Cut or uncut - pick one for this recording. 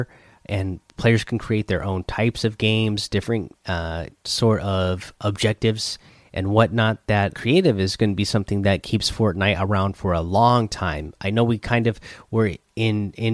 cut